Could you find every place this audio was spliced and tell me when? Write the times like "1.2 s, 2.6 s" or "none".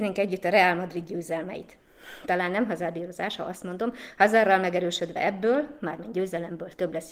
none